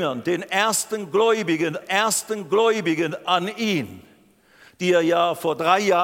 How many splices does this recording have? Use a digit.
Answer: 1